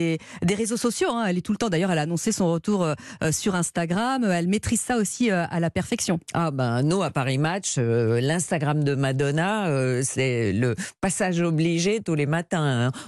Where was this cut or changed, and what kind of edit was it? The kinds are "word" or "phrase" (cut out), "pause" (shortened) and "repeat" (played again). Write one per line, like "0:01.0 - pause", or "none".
none